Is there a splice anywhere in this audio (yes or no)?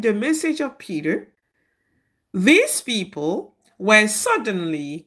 no